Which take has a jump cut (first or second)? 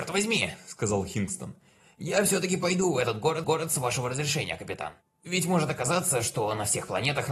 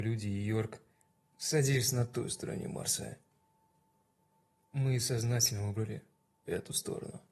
first